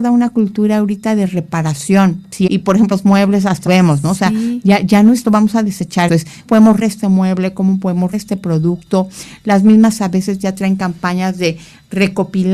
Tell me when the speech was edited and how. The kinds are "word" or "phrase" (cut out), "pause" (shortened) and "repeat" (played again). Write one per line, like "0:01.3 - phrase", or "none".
0:02.5 - word
0:02.9 - word
0:03.7 - word
0:05.2 - word
0:06.1 - word
0:06.4 - word
0:06.8 - word
0:08.1 - word
0:10.0 - word